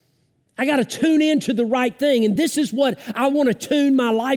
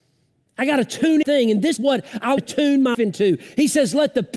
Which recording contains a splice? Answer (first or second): second